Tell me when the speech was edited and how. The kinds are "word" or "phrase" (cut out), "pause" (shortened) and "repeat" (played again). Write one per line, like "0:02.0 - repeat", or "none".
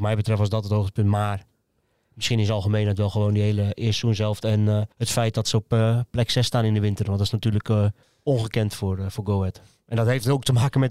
0:04.9 - pause
0:08.0 - pause